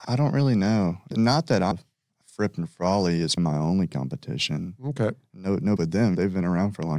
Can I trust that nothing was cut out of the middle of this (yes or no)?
no